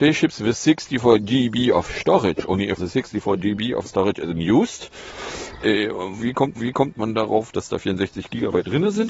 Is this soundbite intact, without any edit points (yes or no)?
no